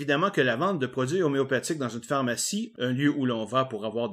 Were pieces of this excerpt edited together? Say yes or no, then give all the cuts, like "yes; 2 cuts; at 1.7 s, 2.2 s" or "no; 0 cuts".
no; 0 cuts